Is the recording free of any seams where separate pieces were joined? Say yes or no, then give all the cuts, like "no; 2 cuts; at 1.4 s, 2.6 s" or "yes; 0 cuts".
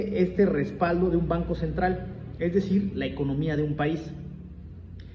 yes; 0 cuts